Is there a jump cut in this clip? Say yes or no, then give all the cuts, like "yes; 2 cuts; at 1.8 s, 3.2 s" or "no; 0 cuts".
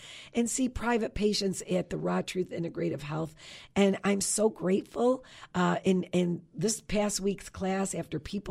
no; 0 cuts